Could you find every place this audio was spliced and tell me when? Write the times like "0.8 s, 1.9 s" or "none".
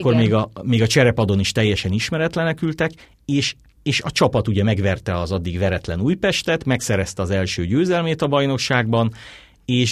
none